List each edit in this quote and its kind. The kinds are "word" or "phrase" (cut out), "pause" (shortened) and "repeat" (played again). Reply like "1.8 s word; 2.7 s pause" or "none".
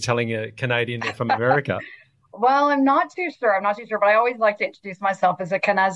none